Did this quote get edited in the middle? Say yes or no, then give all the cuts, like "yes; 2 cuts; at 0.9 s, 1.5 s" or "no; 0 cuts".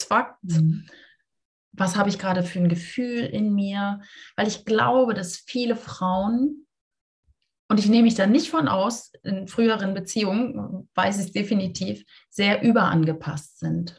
no; 0 cuts